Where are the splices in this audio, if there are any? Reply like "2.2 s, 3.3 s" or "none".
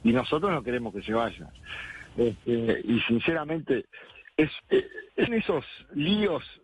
2.8 s, 4.6 s, 5.3 s